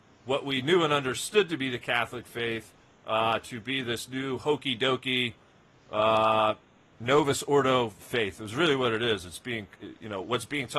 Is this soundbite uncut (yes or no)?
yes